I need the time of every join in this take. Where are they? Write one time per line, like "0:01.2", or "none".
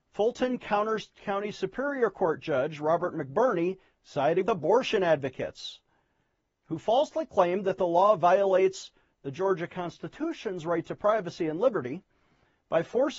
0:04.4